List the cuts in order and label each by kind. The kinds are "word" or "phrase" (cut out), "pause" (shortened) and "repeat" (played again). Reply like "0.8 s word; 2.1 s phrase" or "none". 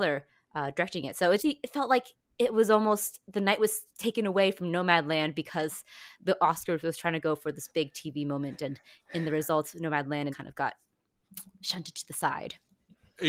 1.4 s word; 3.9 s pause; 6.2 s pause; 10.3 s phrase